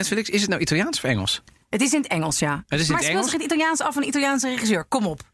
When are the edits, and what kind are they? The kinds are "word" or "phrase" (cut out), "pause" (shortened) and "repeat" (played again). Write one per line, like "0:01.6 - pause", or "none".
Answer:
none